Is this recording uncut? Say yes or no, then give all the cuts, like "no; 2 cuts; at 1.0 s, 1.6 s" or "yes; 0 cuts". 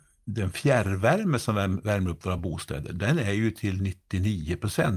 yes; 0 cuts